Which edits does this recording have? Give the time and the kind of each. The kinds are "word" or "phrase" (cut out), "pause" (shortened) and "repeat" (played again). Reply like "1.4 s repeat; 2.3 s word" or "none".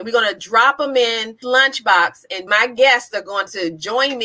1.4 s word; 2.5 s word